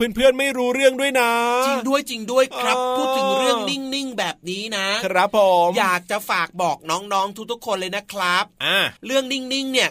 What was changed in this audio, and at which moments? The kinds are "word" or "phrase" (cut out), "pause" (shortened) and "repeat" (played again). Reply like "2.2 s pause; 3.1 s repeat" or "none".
9.0 s pause